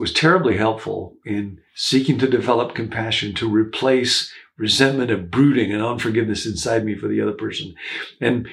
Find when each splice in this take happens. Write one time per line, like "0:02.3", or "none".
none